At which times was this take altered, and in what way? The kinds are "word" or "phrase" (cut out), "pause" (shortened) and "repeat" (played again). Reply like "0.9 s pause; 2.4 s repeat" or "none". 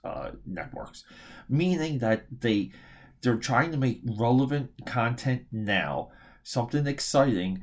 none